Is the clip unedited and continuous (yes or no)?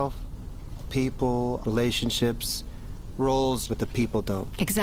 no